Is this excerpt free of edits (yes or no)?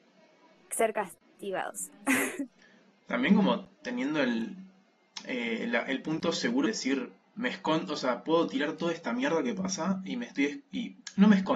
no